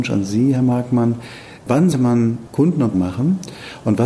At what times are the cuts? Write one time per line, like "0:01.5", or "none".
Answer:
0:01.9
0:02.5
0:02.9